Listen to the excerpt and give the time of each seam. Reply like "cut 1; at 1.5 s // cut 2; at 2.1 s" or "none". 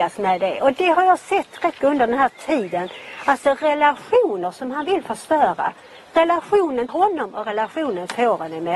cut 1; at 1.8 s // cut 2; at 6.9 s